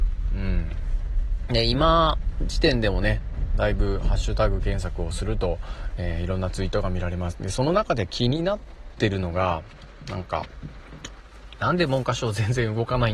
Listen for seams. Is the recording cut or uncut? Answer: uncut